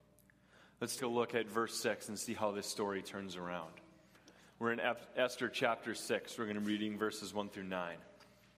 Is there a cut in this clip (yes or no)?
yes